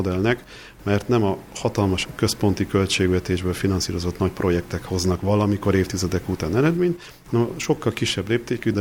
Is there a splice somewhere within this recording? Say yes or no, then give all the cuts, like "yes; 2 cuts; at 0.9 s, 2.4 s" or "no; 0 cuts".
no; 0 cuts